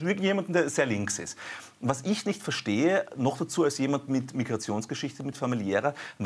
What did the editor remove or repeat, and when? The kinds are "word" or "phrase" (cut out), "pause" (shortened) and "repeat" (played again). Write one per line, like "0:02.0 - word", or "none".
none